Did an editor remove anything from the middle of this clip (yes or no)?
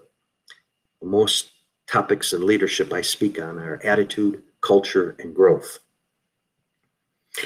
no